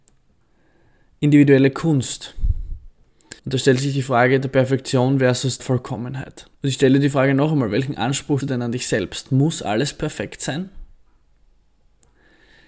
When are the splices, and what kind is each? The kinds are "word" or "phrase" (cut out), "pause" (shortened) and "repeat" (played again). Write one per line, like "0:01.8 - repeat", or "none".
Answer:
0:03.4 - pause
0:05.6 - word
0:06.5 - pause
0:08.4 - word